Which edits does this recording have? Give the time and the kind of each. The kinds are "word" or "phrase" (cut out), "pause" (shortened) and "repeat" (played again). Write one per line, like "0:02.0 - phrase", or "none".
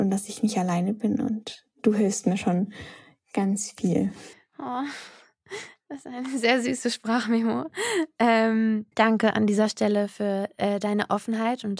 0:08.9 - pause